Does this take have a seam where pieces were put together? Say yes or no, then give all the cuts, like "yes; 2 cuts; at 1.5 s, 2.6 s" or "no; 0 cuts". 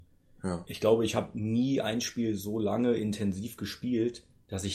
no; 0 cuts